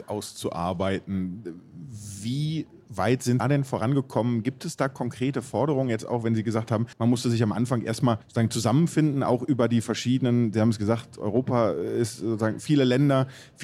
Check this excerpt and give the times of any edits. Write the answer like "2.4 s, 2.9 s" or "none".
3.4 s, 6.9 s, 8.2 s